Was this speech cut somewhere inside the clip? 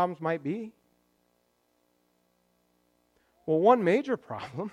no; 0 cuts

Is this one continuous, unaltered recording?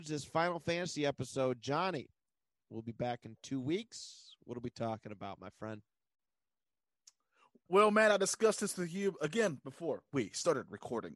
yes; 0 cuts

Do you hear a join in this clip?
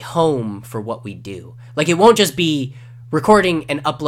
no; 0 cuts

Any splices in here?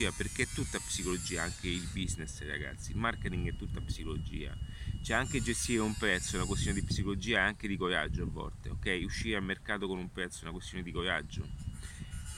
no; 0 cuts

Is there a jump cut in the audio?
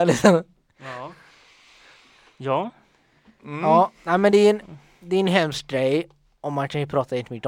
no; 0 cuts

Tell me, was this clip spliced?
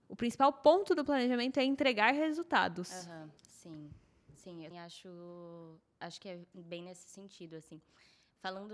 yes; 2 cuts; at 3.4 s, 4.7 s

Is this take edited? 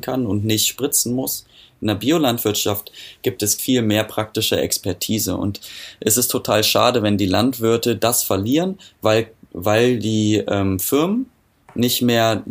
yes; 1 cut; at 3.6 s

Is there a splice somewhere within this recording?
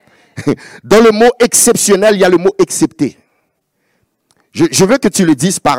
no; 0 cuts

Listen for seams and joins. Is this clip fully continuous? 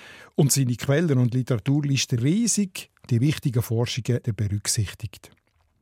no; 3 cuts; at 2.2 s, 3.1 s, 4.2 s

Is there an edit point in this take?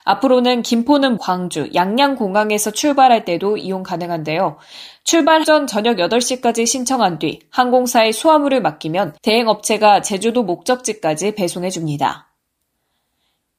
yes; 3 cuts; at 1.2 s, 5.4 s, 9.2 s

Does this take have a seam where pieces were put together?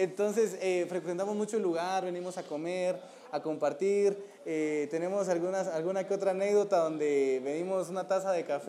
no; 0 cuts

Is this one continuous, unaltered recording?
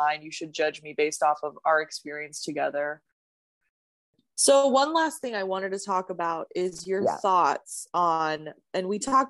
yes; 0 cuts

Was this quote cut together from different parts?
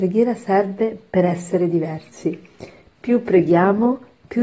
no; 0 cuts

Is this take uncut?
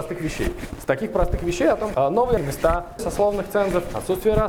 no; 3 cuts; at 1.9 s, 2.4 s, 3.0 s

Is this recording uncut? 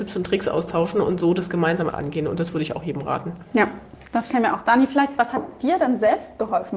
no; 1 cut; at 1.9 s

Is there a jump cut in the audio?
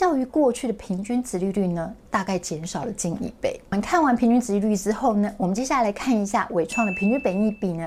yes; 1 cut; at 2.1 s

